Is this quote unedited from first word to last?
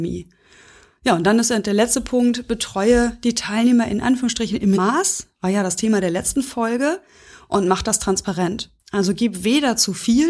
no; 2 cuts; at 4.8 s, 8.8 s

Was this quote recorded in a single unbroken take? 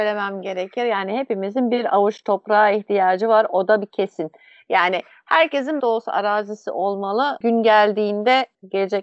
no; 1 cut; at 5.8 s

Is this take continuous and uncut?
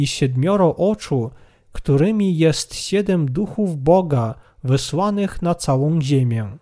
yes; 0 cuts

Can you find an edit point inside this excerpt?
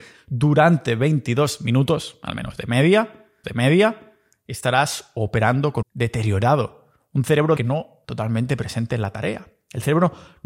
yes; 4 cuts; at 3.4 s, 5.8 s, 7.6 s, 8.0 s

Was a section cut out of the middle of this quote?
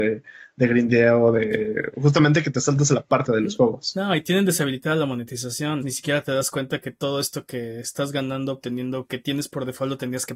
yes; 2 cuts; at 3.3 s, 5.8 s

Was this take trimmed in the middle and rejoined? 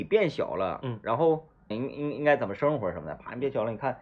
yes; 1 cut; at 1.7 s

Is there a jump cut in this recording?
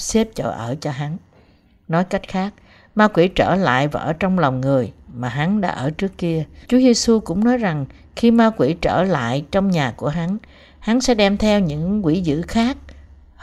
yes; 1 cut; at 6.6 s

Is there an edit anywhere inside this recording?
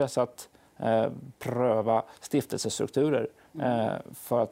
no; 0 cuts

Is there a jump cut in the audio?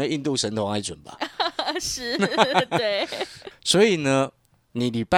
yes; 1 cut; at 3.5 s

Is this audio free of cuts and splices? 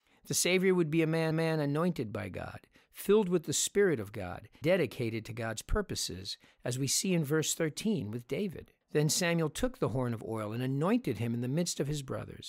no; 3 cuts; at 1.3 s, 4.6 s, 8.8 s

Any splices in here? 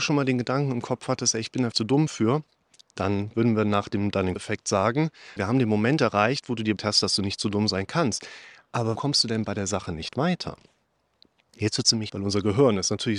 yes; 6 cuts; at 1.7 s, 4.4 s, 5.4 s, 6.8 s, 9.0 s, 12.1 s

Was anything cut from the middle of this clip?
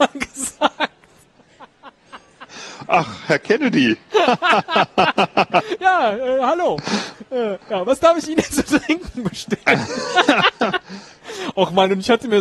no; 0 cuts

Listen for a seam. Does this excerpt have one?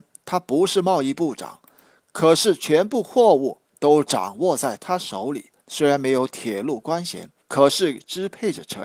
yes; 2 cuts; at 5.6 s, 7.4 s

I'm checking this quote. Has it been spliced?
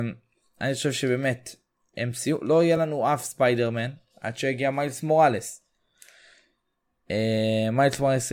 no; 0 cuts

